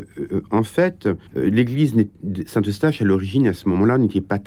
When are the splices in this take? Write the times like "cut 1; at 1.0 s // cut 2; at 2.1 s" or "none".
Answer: cut 1; at 1.3 s